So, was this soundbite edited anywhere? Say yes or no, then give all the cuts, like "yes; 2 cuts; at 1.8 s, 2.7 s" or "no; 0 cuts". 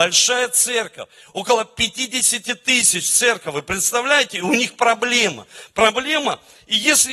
no; 0 cuts